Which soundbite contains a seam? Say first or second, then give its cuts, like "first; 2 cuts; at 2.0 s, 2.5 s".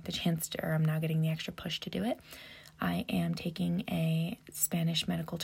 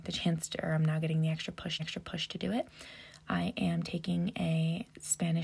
second; 1 cut; at 1.8 s